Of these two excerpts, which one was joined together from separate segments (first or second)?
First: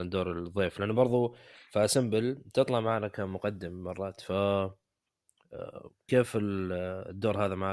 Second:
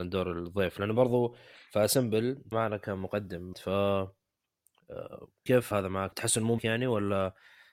second